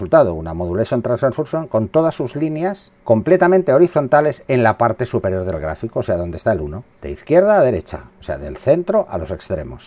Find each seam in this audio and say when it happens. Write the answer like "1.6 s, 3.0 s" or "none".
3.0 s, 6.9 s, 8.1 s